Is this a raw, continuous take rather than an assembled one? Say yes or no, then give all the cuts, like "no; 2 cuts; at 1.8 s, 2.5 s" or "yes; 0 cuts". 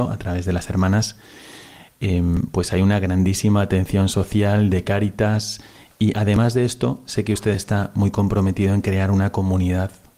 yes; 0 cuts